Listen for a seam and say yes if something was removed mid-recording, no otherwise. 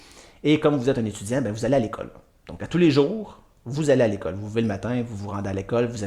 no